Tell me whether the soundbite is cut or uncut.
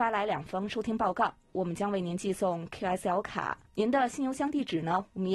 cut